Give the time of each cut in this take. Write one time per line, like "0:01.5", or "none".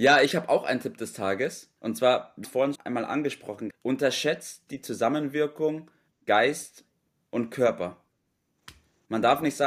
0:01.8
0:02.4
0:02.7
0:03.7
0:04.7
0:06.1